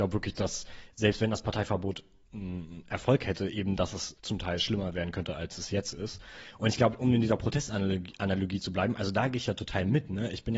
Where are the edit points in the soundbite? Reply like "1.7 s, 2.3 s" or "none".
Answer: 4.2 s